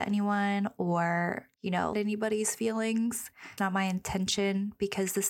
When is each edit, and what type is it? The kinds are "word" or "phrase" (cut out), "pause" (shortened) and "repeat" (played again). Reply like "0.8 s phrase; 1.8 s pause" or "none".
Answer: 1.5 s word; 1.9 s phrase; 3.6 s word

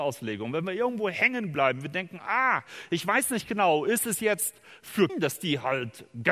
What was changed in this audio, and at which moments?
5.1 s word

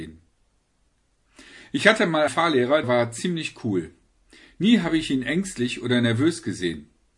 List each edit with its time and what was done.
2.3 s word; 2.8 s word

